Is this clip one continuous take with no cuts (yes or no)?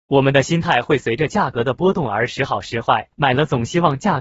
no